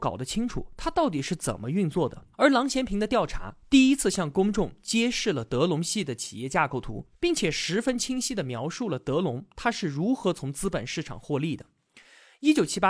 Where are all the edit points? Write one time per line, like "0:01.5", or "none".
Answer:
0:02.3